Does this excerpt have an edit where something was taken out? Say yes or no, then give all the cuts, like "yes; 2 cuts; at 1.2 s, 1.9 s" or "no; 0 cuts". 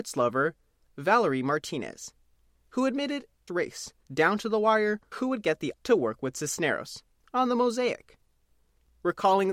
yes; 5 cuts; at 3.5 s, 4.0 s, 5.1 s, 5.7 s, 7.2 s